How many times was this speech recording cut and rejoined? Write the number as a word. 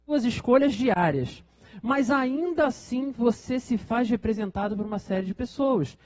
zero